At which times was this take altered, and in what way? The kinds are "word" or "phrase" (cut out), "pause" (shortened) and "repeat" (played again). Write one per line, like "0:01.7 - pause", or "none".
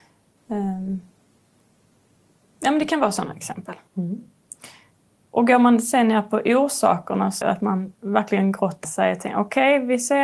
0:03.9 - pause
0:07.4 - phrase
0:08.8 - word